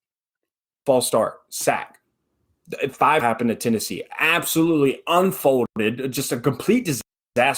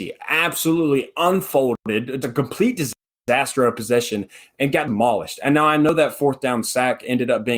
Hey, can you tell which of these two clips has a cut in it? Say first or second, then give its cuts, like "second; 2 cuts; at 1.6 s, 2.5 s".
second; 1 cut; at 2.2 s